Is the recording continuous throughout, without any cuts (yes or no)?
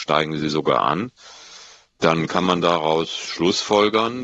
yes